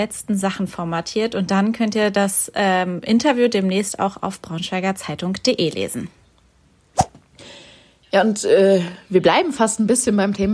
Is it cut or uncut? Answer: uncut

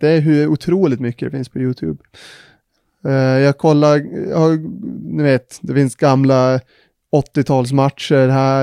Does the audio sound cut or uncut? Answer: uncut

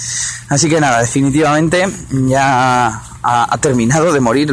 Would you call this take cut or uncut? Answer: uncut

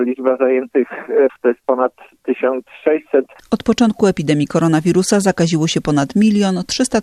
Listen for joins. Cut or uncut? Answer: cut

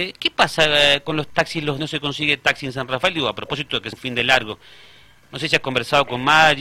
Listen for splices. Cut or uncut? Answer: cut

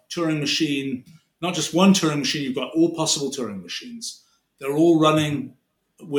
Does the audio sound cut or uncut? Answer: uncut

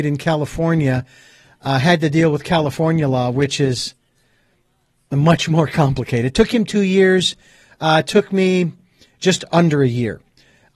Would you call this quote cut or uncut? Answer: uncut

